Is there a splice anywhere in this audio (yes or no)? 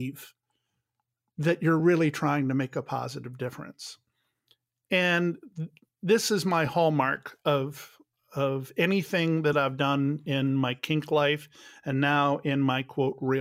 no